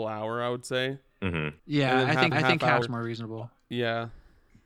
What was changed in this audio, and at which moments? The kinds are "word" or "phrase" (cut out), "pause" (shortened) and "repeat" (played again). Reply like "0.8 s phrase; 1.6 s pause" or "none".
1.6 s pause; 2.3 s repeat; 2.8 s word